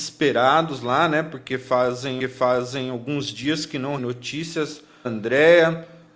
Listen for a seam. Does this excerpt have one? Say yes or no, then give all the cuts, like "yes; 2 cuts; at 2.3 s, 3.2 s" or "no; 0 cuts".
yes; 3 cuts; at 2.2 s, 4.0 s, 5.0 s